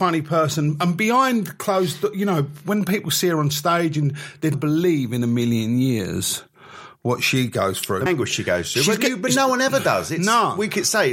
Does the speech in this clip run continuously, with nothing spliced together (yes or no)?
no